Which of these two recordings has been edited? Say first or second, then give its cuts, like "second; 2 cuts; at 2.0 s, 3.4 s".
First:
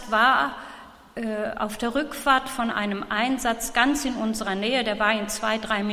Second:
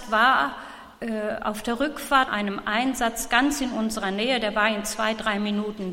second; 2 cuts; at 0.9 s, 2.3 s